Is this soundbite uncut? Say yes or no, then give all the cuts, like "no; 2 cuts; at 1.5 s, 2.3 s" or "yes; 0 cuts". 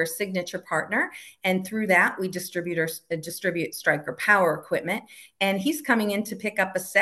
yes; 0 cuts